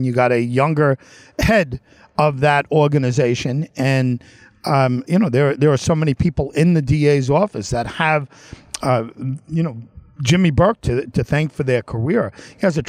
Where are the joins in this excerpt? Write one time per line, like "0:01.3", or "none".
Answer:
0:05.1